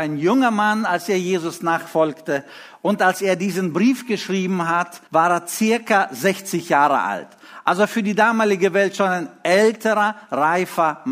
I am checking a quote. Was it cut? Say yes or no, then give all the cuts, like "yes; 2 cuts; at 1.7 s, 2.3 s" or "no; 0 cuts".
yes; 1 cut; at 5.1 s